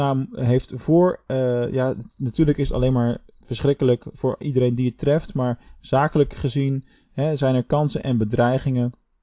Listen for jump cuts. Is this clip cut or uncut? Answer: uncut